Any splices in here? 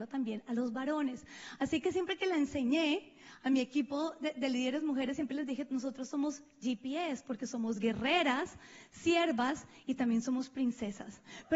no; 0 cuts

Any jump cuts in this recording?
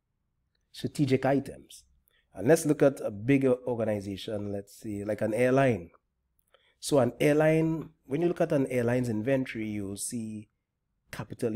no; 0 cuts

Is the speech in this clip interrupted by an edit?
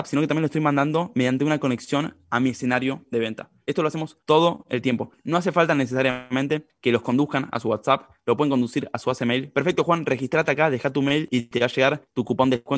yes; 1 cut; at 4.2 s

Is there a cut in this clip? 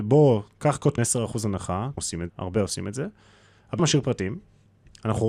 yes; 4 cuts; at 1.0 s, 2.0 s, 2.3 s, 3.8 s

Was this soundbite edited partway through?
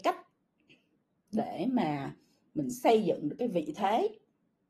no; 0 cuts

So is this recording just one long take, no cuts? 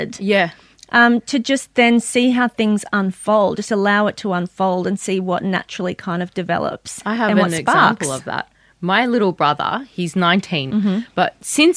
no; 1 cut; at 10.7 s

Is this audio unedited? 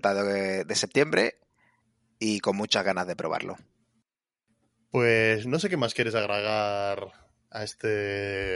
yes; 0 cuts

